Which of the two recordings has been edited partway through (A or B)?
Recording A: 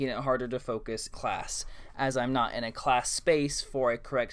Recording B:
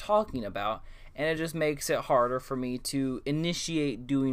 A